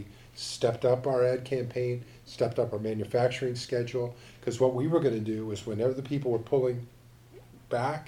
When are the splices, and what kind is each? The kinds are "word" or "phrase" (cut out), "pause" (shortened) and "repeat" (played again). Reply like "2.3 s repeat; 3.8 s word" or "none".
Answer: none